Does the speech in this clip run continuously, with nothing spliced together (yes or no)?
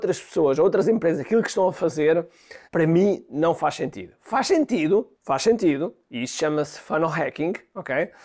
no